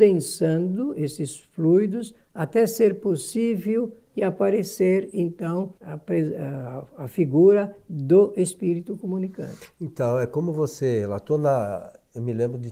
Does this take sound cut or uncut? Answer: cut